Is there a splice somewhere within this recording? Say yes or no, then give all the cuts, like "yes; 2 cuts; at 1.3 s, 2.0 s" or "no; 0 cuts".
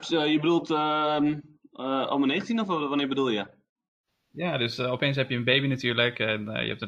no; 0 cuts